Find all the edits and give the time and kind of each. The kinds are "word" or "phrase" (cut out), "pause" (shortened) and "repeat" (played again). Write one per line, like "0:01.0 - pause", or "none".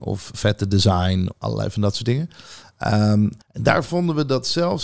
0:01.3 - word
0:03.4 - pause